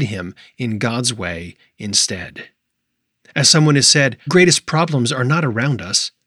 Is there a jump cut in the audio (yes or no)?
yes